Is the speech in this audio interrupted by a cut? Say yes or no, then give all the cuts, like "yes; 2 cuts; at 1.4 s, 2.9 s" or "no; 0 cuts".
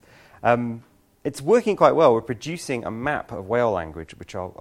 no; 0 cuts